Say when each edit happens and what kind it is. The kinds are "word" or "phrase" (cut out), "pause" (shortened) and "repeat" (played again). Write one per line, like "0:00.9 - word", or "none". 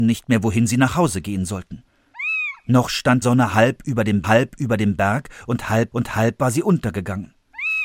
0:03.2 - word
0:04.2 - repeat
0:05.9 - repeat